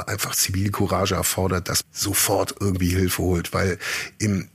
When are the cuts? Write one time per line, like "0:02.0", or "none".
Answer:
0:01.8